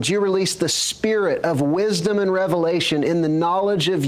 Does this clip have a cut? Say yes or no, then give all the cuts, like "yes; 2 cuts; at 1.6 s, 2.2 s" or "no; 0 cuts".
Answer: no; 0 cuts